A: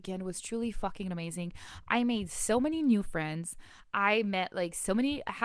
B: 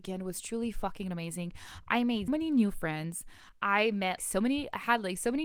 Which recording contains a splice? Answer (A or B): B